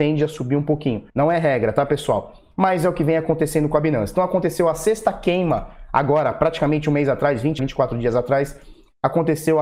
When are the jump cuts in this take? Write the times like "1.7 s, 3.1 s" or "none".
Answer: 1.1 s, 7.6 s

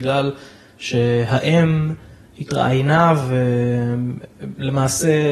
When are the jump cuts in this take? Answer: none

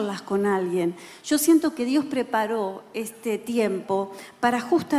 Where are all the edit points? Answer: none

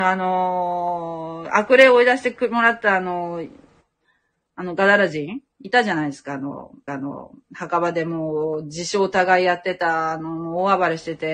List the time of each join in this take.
5.5 s, 6.9 s

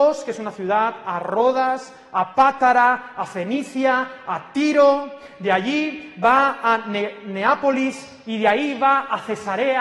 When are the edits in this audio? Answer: none

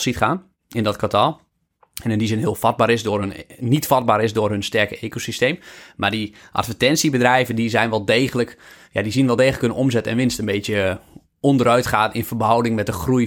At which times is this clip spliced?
none

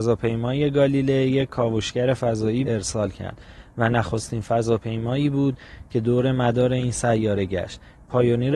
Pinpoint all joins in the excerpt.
2.7 s

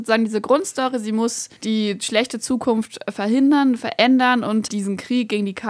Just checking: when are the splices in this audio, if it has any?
1.6 s, 4.7 s

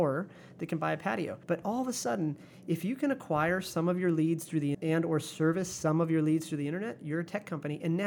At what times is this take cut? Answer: 1.4 s, 4.7 s

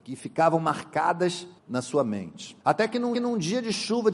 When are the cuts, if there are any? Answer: 1.6 s, 2.6 s, 3.1 s

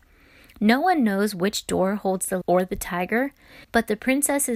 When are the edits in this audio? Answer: 2.4 s, 3.6 s

